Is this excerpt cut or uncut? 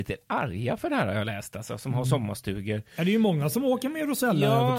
uncut